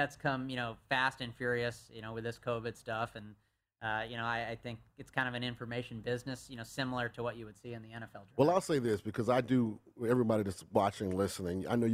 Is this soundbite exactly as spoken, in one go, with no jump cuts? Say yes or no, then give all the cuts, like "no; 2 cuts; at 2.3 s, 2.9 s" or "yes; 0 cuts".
yes; 0 cuts